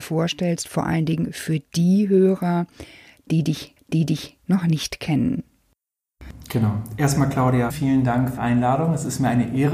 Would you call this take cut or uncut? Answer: cut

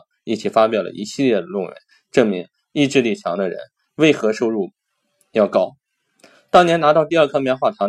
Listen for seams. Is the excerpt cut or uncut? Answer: uncut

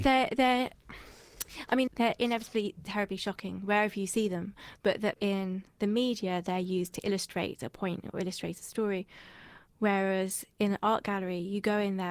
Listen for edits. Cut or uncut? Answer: cut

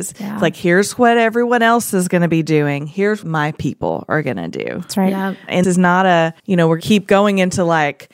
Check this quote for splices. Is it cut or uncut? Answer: cut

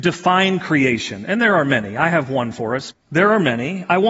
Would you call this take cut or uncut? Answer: cut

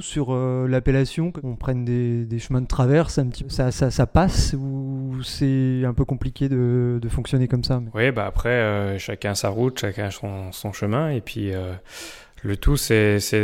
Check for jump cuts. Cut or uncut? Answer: uncut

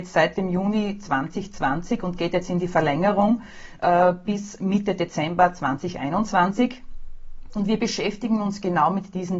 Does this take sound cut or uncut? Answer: uncut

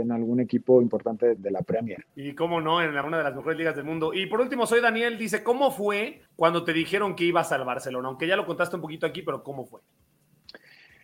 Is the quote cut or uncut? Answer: cut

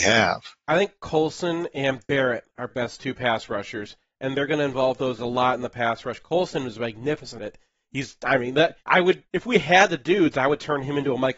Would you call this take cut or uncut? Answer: cut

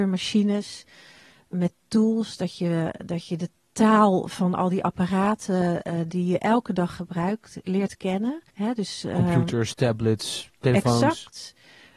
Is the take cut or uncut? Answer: cut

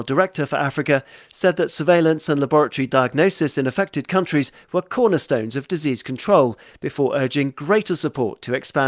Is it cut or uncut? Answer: uncut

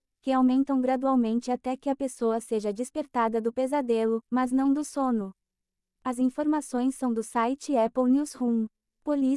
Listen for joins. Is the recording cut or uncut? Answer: uncut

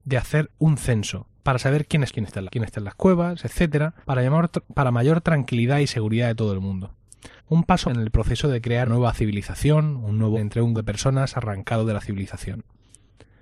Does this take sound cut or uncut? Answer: cut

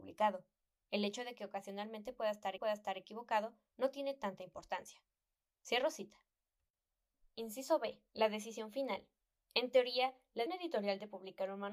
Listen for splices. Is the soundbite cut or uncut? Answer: cut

